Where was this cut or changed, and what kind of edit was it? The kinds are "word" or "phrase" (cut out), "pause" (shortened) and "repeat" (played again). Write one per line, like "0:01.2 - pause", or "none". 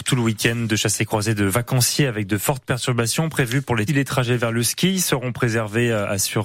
0:03.9 - phrase